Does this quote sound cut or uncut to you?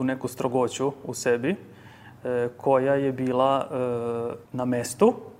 cut